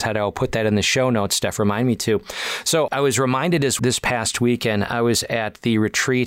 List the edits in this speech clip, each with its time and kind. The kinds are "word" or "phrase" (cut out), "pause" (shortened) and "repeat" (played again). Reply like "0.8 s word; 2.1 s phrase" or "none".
2.9 s word; 3.8 s phrase